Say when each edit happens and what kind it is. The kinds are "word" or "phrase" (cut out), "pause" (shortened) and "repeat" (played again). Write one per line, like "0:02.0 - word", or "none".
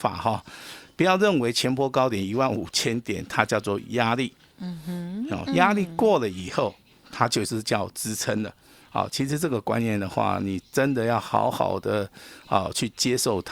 none

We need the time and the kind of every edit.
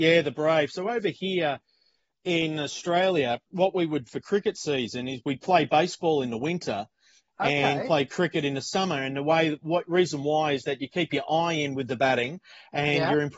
0:04.1 - word

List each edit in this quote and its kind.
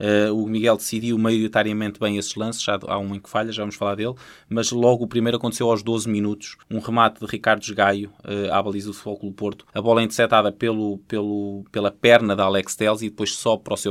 0:06.6 - pause
0:09.7 - pause

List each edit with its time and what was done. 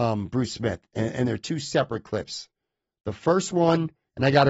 none

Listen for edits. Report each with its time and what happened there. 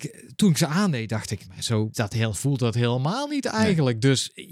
0:01.5 - word
0:01.9 - word
0:02.3 - word

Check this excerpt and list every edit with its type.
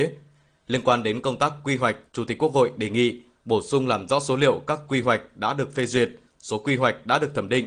0:02.1 - pause

